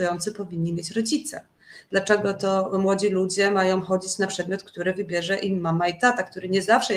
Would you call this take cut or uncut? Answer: uncut